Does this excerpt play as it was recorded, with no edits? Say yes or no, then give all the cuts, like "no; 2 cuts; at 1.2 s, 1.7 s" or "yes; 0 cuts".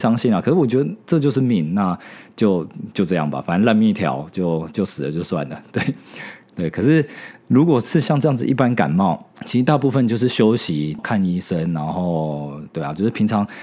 no; 1 cut; at 11.0 s